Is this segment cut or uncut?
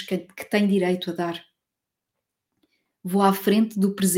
uncut